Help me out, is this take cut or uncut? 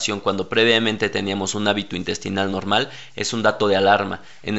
uncut